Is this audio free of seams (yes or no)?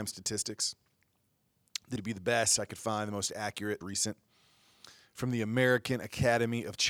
no